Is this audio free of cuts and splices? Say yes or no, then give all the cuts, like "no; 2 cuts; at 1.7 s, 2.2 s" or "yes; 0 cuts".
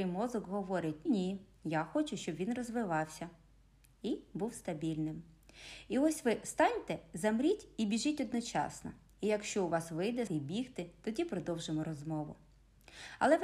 no; 2 cuts; at 1.1 s, 10.3 s